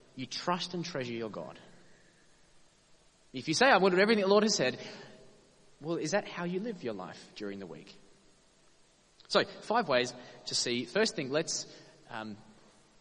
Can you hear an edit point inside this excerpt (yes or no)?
no